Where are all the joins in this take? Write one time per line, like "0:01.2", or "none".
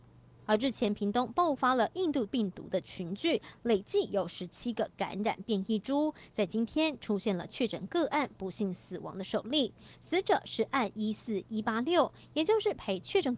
0:02.3